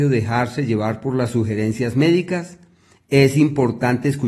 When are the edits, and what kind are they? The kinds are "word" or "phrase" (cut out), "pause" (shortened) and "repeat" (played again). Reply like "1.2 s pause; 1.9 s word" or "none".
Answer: none